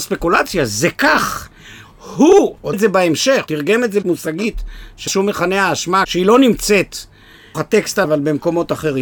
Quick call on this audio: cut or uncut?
cut